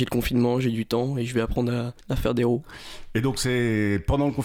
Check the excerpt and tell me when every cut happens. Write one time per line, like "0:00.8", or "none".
0:02.0